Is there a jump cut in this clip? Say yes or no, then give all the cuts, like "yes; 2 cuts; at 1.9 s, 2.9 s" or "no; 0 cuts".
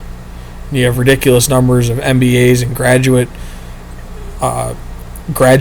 no; 0 cuts